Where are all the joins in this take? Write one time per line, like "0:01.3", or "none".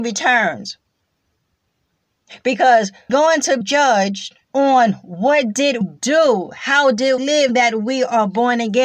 0:03.1
0:03.6
0:04.4
0:05.8
0:07.2
0:07.5